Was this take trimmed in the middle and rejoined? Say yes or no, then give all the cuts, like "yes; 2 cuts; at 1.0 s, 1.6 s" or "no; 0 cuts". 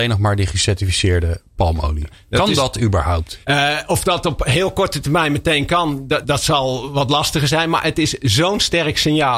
yes; 2 cuts; at 3.4 s, 6.2 s